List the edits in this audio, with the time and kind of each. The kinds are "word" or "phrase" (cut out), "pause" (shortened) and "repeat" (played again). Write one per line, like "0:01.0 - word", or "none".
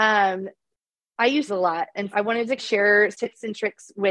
0:01.5 - word
0:02.1 - word
0:02.6 - word
0:03.1 - word